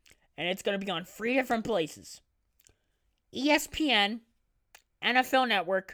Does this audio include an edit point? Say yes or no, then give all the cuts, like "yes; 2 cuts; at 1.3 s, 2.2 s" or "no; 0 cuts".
no; 0 cuts